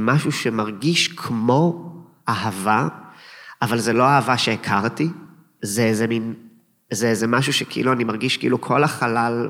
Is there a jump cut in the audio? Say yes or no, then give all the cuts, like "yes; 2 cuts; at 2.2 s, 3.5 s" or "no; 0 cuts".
no; 0 cuts